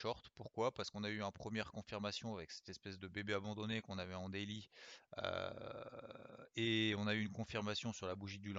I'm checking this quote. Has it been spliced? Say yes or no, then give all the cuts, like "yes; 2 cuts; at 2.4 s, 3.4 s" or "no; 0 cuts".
no; 0 cuts